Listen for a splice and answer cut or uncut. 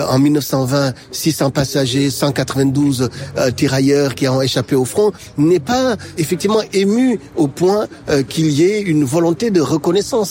cut